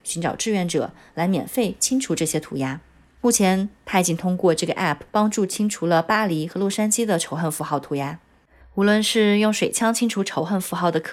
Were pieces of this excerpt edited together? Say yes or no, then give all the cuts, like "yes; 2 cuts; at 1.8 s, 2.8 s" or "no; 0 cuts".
yes; 1 cut; at 5.1 s